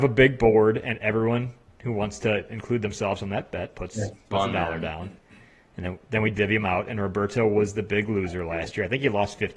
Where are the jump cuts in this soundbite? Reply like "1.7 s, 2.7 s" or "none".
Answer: none